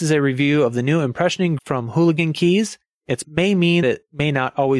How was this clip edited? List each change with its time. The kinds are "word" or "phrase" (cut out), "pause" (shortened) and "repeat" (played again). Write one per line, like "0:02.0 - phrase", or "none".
0:01.6 - word
0:03.2 - word
0:03.8 - word

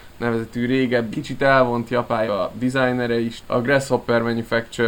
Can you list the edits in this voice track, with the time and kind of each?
0:01.1 - word
0:02.3 - word
0:03.4 - word

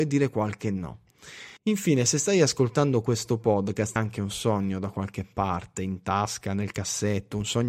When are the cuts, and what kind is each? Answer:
0:01.6 - pause
0:04.0 - phrase

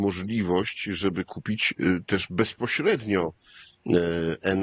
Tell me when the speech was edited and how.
none

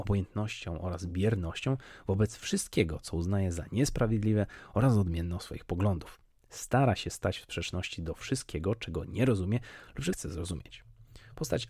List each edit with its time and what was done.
0:10.1 - word

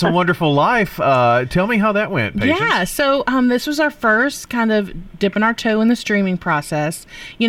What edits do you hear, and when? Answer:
none

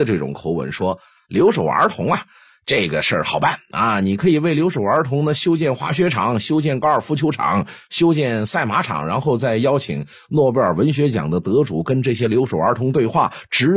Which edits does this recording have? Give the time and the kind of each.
none

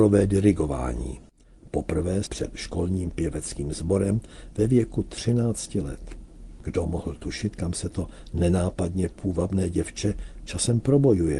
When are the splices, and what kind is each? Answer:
0:02.2 - word

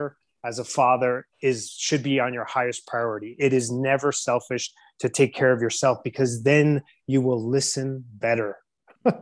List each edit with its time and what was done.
none

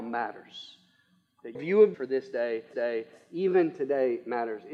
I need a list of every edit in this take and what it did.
0:01.5 - word
0:01.9 - phrase
0:02.7 - repeat

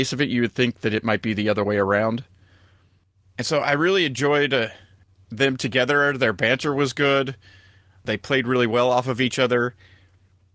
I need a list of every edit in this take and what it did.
none

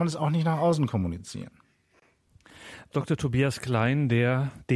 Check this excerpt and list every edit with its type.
0:02.9 - word

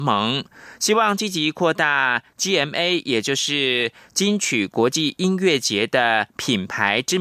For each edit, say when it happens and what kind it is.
none

